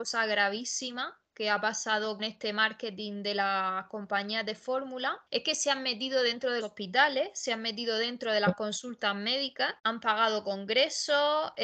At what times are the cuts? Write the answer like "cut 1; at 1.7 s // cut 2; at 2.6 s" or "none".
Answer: cut 1; at 2.2 s // cut 2; at 5.3 s // cut 3; at 6.6 s // cut 4; at 9.8 s

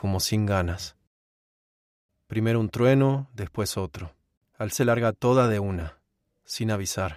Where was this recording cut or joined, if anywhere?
cut 1; at 4.7 s

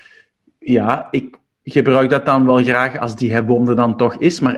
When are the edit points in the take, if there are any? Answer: none

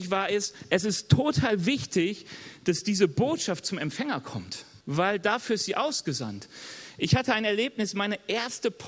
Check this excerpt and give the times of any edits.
cut 1; at 4.8 s

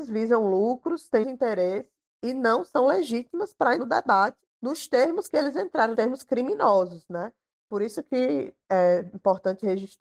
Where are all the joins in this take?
cut 1; at 1.2 s // cut 2; at 3.8 s // cut 3; at 5.9 s

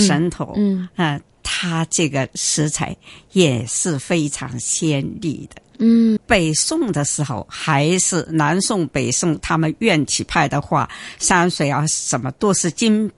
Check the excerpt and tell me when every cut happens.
cut 1; at 6.2 s

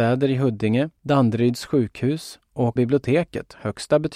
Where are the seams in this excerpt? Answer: cut 1; at 1.0 s // cut 2; at 2.8 s

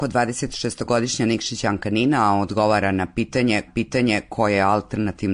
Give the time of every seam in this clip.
cut 1; at 3.7 s

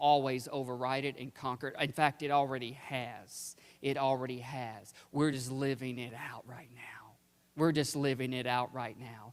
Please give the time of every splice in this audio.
none

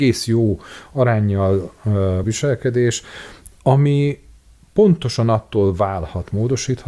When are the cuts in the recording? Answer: cut 1; at 2.2 s

